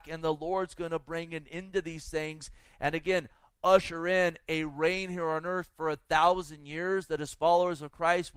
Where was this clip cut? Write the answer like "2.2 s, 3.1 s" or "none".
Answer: none